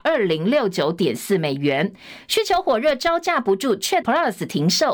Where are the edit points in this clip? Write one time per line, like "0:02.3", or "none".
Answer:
0:04.0

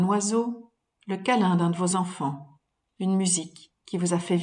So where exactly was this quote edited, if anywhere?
none

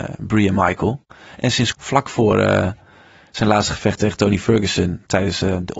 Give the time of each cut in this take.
0:01.7

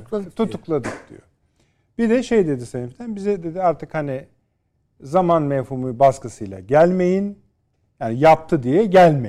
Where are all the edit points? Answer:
none

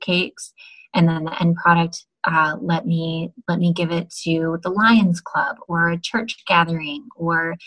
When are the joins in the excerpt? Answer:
none

